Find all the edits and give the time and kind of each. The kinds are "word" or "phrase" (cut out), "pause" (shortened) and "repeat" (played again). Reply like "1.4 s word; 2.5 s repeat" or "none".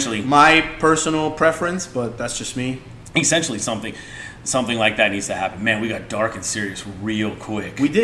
none